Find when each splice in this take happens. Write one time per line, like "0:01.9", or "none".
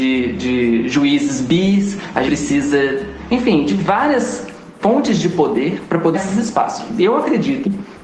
0:02.2
0:04.8
0:06.1